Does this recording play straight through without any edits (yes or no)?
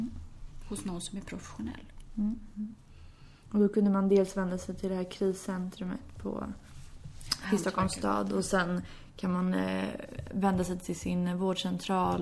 yes